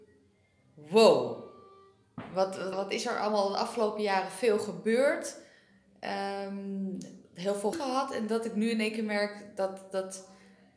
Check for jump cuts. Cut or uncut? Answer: cut